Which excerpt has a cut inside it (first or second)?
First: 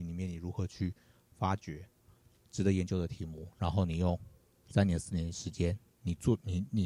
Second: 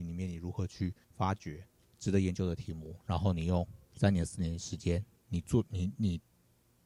second